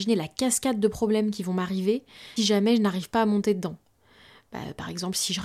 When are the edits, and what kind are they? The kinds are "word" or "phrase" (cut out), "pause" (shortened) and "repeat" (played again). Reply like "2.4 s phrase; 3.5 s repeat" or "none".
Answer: 2.4 s word